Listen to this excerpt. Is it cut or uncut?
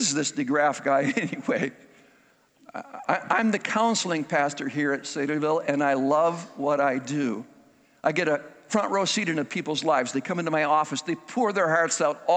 uncut